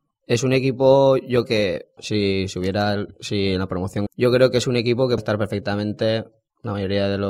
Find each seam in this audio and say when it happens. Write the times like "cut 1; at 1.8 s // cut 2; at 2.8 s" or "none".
cut 1; at 1.4 s // cut 2; at 2.0 s // cut 3; at 4.1 s // cut 4; at 5.2 s